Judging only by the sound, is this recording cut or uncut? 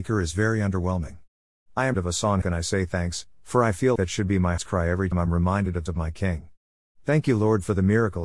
cut